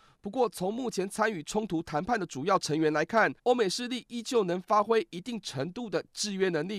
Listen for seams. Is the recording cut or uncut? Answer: cut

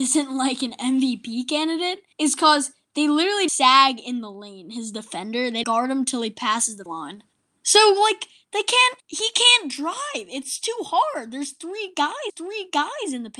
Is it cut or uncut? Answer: cut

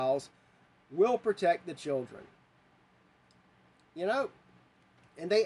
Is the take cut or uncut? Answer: uncut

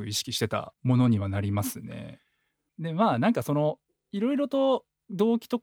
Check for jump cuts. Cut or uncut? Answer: uncut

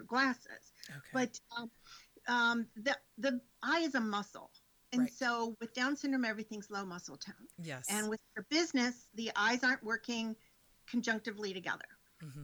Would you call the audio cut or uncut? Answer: uncut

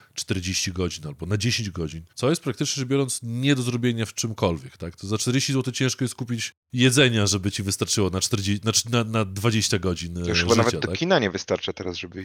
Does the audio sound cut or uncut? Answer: cut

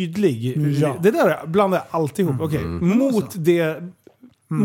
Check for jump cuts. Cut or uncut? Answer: uncut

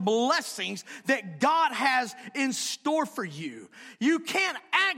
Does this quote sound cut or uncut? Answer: uncut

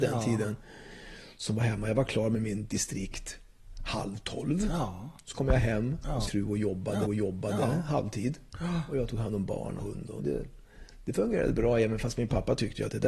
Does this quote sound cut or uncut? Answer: cut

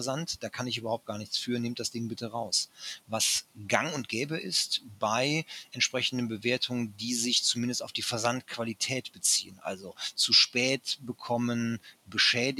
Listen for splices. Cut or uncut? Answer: uncut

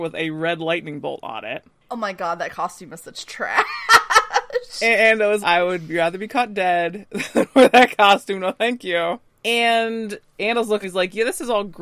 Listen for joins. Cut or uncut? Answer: cut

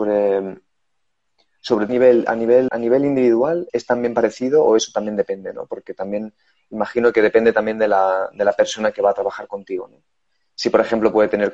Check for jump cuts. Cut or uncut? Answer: cut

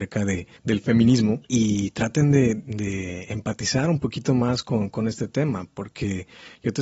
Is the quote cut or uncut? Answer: cut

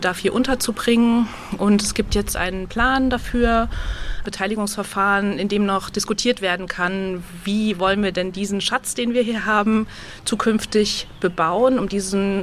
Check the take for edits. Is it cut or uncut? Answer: cut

